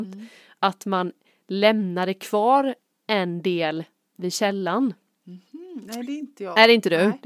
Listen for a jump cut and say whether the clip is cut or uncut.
uncut